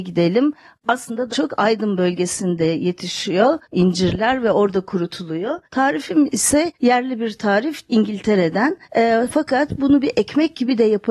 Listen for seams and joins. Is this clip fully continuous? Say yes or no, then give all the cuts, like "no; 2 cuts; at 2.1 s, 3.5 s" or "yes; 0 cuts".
no; 6 cuts; at 1.3 s, 3.6 s, 5.6 s, 6.7 s, 7.9 s, 8.8 s